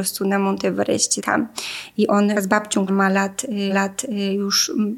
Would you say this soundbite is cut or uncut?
cut